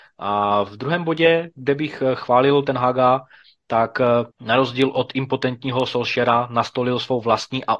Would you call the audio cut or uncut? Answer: cut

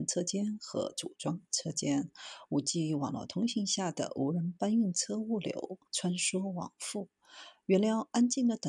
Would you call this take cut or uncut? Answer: cut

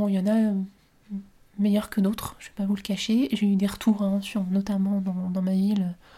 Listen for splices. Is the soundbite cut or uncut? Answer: uncut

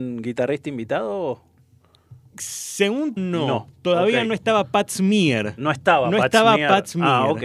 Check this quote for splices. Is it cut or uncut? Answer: cut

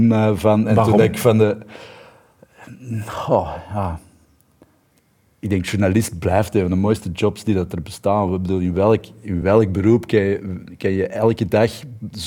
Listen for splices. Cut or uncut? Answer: uncut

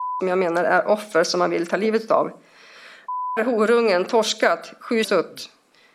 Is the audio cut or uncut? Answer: cut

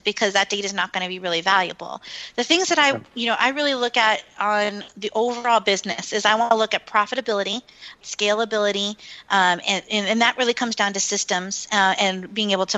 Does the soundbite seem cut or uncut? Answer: cut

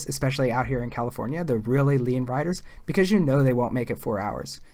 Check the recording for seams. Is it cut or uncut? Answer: uncut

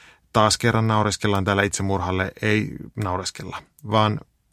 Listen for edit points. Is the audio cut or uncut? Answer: uncut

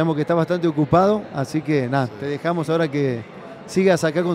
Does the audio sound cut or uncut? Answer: uncut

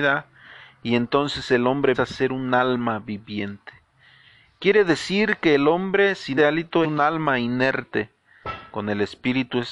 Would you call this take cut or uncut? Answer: cut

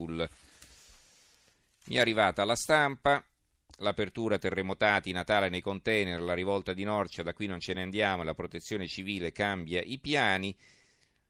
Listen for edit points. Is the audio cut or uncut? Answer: uncut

